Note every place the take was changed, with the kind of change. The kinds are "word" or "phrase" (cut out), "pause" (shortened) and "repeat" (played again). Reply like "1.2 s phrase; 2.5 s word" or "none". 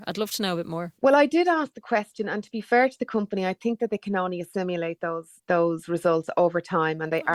1.0 s pause; 5.4 s pause